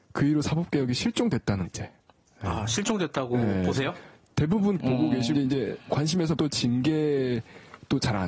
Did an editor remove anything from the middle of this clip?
yes; 4 cuts; at 1.6 s, 4.8 s, 5.3 s, 6.4 s

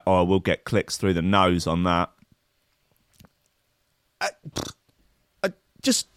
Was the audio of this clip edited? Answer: no; 0 cuts

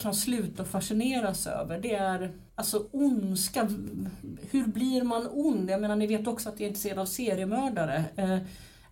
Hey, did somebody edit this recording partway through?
yes; 1 cut; at 2.5 s

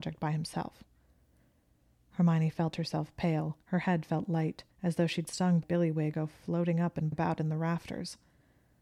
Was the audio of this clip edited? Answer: yes; 6 cuts; at 3.6 s, 4.7 s, 5.3 s, 5.6 s, 6.1 s, 7.1 s

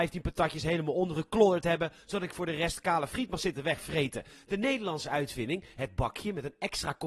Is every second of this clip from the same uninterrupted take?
yes; 0 cuts

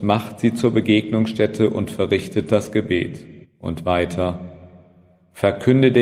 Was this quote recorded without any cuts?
no; 1 cut; at 3.4 s

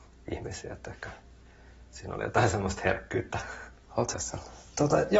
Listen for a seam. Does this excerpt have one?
yes; 1 cut; at 4.1 s

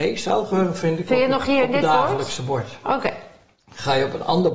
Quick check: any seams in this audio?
no; 0 cuts

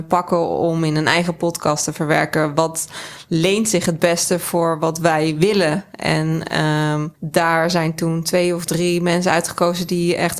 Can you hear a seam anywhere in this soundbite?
yes; 1 cut; at 7.2 s

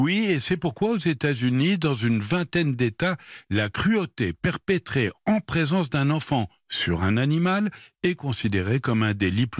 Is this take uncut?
yes; 0 cuts

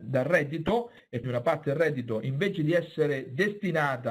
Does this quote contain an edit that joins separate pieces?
yes; 1 cut; at 1.2 s

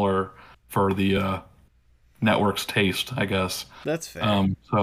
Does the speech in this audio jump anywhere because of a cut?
no; 0 cuts

